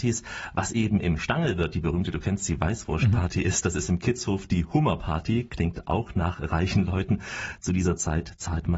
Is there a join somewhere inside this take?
no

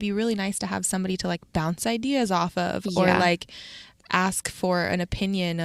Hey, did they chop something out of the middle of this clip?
no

